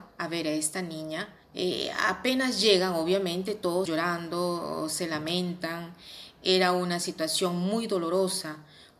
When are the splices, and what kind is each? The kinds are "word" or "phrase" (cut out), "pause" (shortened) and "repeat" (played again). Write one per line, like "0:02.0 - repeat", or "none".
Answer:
0:01.4 - pause
0:03.9 - word